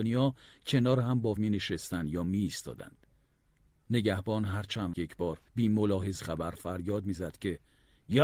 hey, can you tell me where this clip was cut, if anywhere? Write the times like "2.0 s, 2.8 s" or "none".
1.4 s, 4.9 s, 5.5 s, 6.2 s